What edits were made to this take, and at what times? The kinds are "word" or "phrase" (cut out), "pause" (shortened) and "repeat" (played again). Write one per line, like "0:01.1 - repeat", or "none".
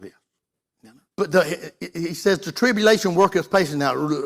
0:01.1 - pause